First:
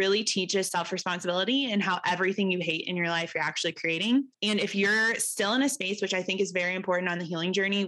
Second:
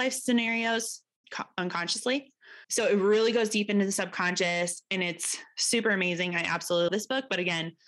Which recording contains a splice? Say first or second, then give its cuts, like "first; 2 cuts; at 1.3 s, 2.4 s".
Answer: second; 3 cuts; at 1.2 s, 2.6 s, 6.9 s